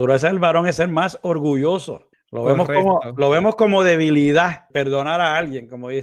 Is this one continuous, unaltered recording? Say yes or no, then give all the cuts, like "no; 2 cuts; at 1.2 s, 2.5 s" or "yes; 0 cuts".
no; 2 cuts; at 2.1 s, 4.7 s